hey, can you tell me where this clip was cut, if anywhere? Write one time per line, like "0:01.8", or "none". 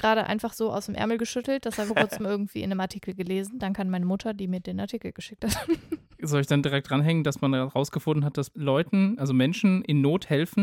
0:01.9
0:08.5